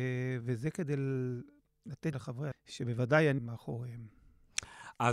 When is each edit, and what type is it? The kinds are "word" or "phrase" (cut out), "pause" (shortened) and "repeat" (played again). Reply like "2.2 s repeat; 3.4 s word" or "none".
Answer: 2.1 s word; 2.5 s word; 3.4 s word

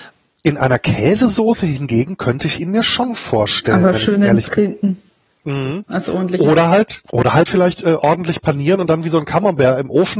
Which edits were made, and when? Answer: 5.3 s pause; 7.1 s pause; 7.5 s phrase

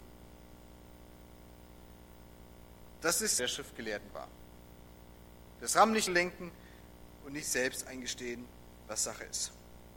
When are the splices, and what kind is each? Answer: 3.4 s phrase; 6.1 s phrase; 7.4 s word

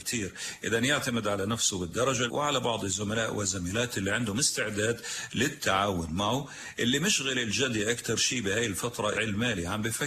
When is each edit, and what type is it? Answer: 2.3 s word; 9.1 s word

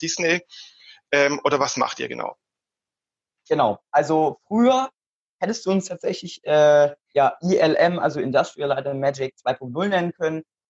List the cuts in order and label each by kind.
none

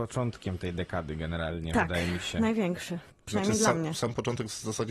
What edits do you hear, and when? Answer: none

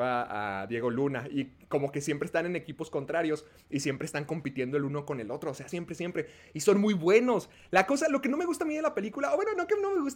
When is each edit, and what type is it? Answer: 5.7 s word

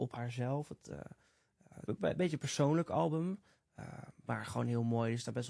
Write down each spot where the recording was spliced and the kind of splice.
1.9 s phrase

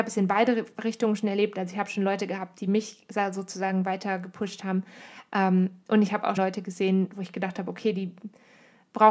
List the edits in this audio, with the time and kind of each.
6.4 s word

